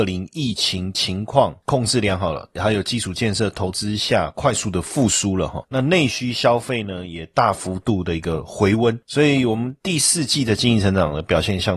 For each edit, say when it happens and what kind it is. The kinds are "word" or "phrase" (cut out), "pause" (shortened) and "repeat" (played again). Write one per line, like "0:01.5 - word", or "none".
0:09.8 - pause